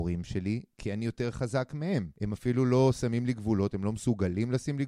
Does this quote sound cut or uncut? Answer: uncut